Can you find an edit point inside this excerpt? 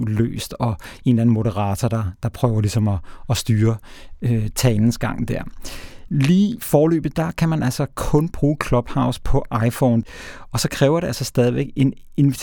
no; 0 cuts

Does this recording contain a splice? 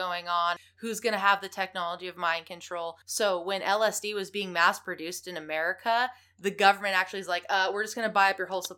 yes; 1 cut; at 3.0 s

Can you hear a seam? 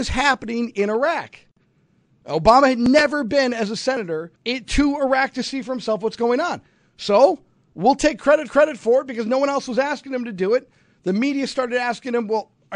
yes; 2 cuts; at 4.4 s, 8.5 s

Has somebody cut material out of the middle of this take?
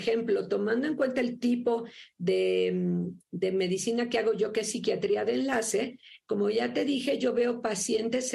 no; 0 cuts

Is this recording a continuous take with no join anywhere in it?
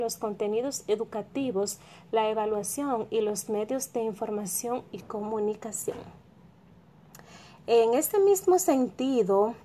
yes; 0 cuts

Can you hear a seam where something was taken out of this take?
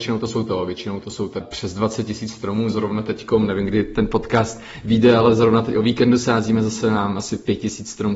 yes; 1 cut; at 1.4 s

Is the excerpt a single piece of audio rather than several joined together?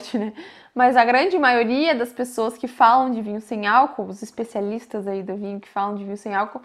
yes; 0 cuts

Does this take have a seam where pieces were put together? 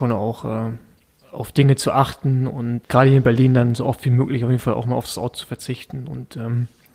yes; 1 cut; at 2.8 s

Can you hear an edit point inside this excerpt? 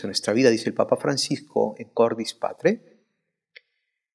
no; 0 cuts

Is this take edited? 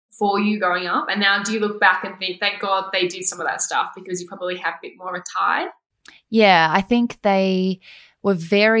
no; 0 cuts

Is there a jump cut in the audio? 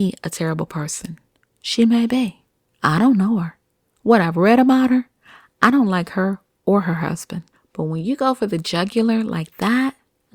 no; 0 cuts

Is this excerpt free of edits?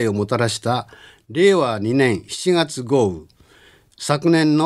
yes; 0 cuts

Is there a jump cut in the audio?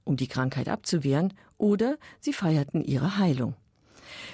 no; 0 cuts

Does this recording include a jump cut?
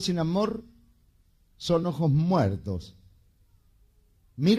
no; 0 cuts

